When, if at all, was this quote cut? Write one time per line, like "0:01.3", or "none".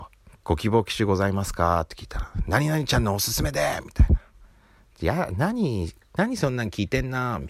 0:06.0